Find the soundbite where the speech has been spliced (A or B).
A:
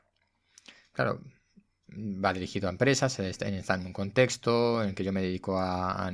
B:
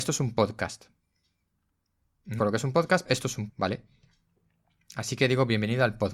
B